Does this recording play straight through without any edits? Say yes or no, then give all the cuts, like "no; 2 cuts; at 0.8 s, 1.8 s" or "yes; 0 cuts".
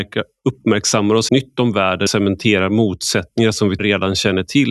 no; 3 cuts; at 1.3 s, 2.1 s, 3.8 s